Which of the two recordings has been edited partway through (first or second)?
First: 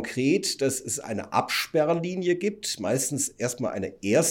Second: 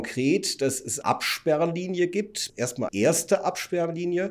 second